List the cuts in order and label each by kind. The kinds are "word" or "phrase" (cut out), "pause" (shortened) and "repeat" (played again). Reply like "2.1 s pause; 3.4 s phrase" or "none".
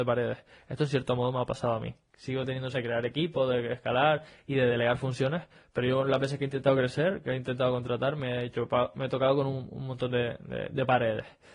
2.7 s word

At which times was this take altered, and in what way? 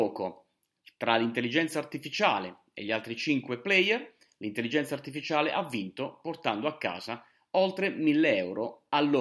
none

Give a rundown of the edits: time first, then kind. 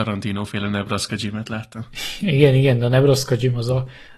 none

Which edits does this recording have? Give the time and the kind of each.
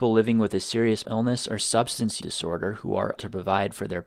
1.0 s word; 1.6 s word; 2.2 s word; 3.2 s word

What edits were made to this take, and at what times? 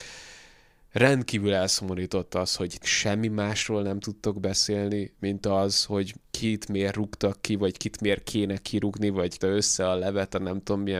2.8 s word; 6.2 s pause; 9.4 s phrase

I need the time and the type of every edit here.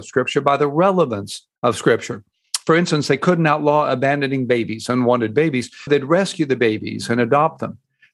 1.6 s pause; 5.9 s word

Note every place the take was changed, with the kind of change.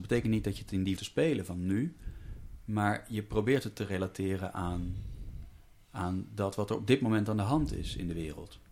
1.0 s phrase; 3.8 s phrase

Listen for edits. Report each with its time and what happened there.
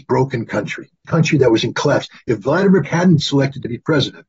1.0 s word; 2.8 s word; 3.2 s word

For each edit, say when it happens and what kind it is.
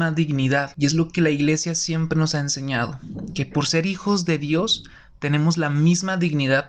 none

